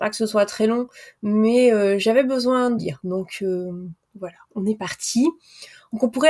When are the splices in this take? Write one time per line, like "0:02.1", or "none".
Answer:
0:02.8
0:04.5